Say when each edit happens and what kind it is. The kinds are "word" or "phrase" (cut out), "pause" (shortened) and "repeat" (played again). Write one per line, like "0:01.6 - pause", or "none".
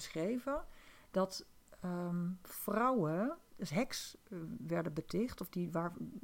0:03.5 - phrase